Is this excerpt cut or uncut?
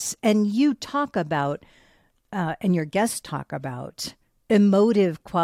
uncut